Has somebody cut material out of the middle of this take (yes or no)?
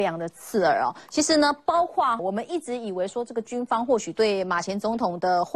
yes